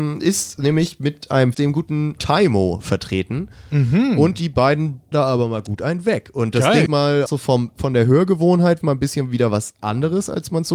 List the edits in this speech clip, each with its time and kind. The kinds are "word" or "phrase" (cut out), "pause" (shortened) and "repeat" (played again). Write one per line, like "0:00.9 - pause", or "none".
0:01.5 - word
0:02.2 - word
0:05.1 - word
0:06.9 - word
0:07.3 - word
0:08.8 - word